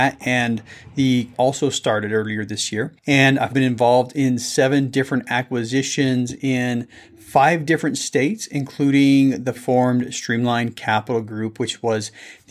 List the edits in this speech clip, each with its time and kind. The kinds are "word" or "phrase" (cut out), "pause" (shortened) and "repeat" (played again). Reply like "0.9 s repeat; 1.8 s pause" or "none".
1.3 s phrase; 3.5 s word; 9.5 s phrase